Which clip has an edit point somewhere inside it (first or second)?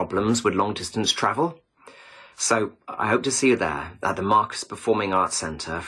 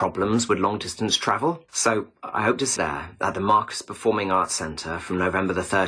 second